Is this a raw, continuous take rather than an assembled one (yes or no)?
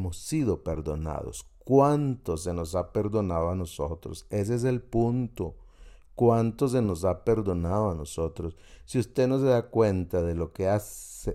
yes